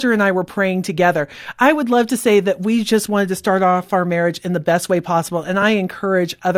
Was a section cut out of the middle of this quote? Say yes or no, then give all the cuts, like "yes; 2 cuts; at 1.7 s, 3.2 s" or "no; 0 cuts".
no; 0 cuts